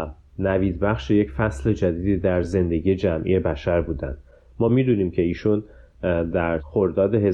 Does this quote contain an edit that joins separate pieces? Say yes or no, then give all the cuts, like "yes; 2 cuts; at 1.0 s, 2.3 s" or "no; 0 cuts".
no; 0 cuts